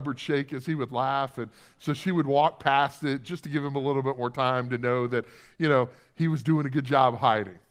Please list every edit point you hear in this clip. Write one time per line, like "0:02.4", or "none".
none